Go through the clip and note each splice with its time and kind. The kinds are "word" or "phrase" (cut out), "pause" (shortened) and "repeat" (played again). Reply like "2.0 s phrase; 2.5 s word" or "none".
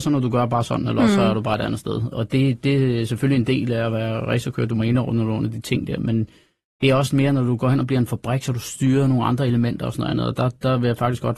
none